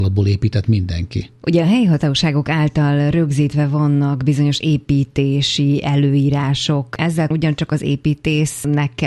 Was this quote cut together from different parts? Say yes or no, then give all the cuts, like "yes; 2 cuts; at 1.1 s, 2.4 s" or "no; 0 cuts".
yes; 1 cut; at 7.3 s